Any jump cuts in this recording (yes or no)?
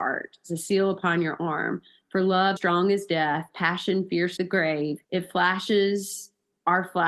yes